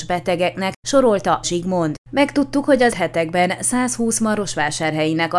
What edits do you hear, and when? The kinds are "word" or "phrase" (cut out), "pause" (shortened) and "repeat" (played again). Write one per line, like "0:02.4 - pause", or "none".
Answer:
0:01.4 - word
0:02.9 - word